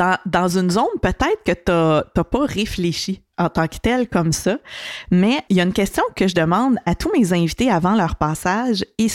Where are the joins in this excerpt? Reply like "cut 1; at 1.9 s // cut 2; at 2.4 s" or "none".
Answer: cut 1; at 5.5 s